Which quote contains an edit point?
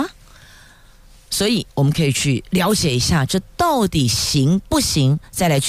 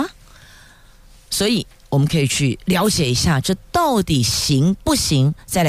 first; 1 cut; at 1.7 s

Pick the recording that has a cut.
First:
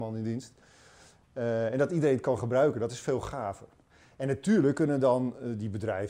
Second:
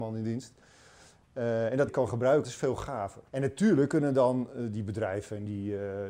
second; 3 cuts; at 1.9 s, 2.4 s, 3.3 s

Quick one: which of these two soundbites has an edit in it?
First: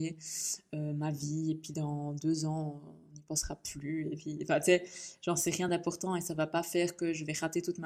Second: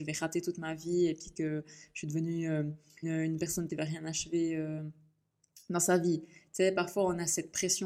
second; 2 cuts; at 3.0 s, 3.7 s

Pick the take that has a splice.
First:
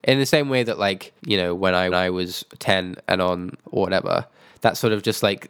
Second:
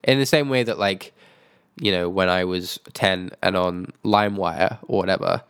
first; 3 cuts; at 1.2 s, 1.9 s, 3.6 s

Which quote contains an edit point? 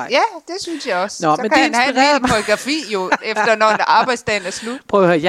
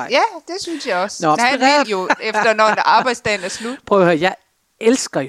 second; 2 cuts; at 1.4 s, 1.8 s

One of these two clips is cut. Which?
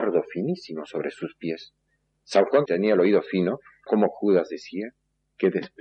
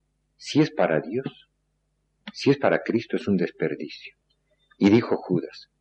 first; 3 cuts; at 1.9 s, 2.7 s, 3.9 s

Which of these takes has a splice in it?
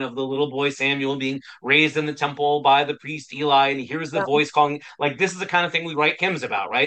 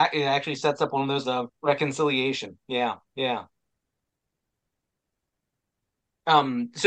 second; 2 cuts; at 1.2 s, 1.5 s

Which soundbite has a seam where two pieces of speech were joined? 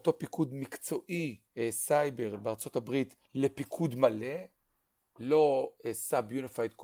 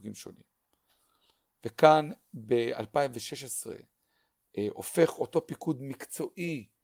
first; 2 cuts; at 1.5 s, 3.2 s

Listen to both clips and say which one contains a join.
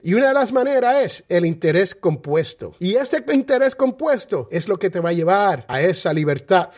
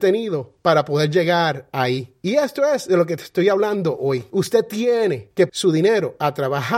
second; 1 cut; at 5.5 s

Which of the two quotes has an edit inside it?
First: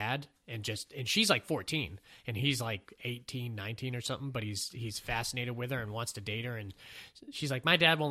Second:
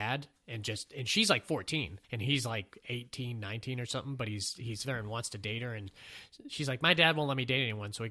second; 2 cuts; at 2.0 s, 4.8 s

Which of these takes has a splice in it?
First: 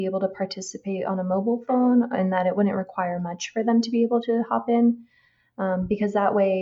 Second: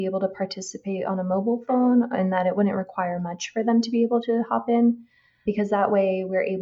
second; 1 cut; at 5.5 s

